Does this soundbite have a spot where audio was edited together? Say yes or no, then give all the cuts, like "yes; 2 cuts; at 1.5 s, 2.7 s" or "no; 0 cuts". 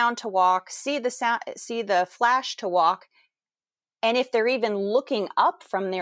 no; 0 cuts